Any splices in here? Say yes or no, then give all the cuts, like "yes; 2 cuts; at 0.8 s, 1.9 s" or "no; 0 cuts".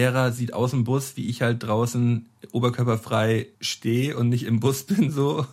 yes; 1 cut; at 3.5 s